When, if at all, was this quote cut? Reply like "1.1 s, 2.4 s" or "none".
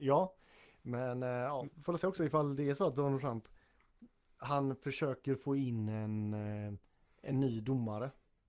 none